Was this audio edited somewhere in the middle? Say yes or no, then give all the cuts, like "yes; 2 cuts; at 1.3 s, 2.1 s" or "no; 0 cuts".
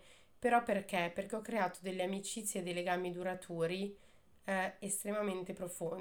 no; 0 cuts